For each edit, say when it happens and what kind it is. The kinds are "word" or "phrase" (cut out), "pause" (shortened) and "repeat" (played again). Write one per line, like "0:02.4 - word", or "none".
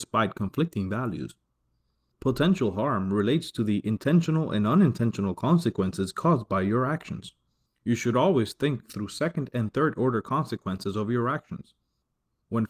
none